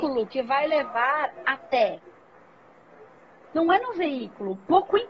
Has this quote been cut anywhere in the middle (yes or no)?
no